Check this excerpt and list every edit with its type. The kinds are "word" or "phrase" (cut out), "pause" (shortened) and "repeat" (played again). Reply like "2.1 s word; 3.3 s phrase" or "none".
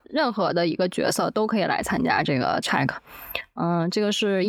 2.6 s word